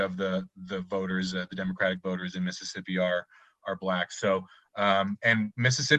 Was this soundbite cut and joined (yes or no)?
no